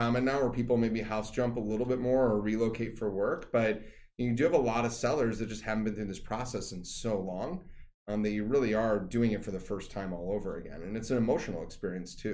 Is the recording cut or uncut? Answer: uncut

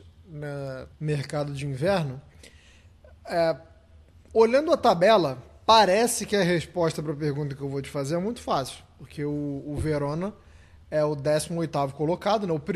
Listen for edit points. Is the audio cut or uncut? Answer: cut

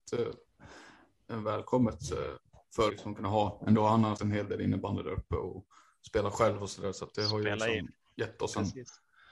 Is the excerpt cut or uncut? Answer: cut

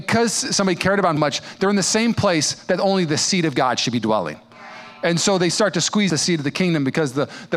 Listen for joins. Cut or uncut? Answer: cut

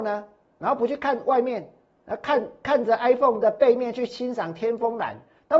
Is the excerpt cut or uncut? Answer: uncut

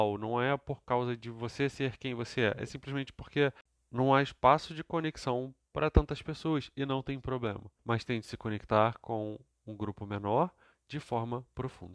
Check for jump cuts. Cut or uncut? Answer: cut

